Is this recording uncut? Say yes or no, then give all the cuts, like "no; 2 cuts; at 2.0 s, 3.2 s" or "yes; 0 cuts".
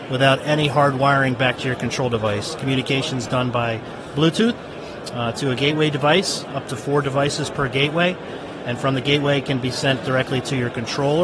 yes; 0 cuts